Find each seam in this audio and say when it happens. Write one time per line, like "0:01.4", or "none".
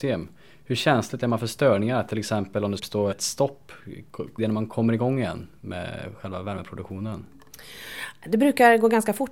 0:01.2
0:02.8
0:03.1
0:04.4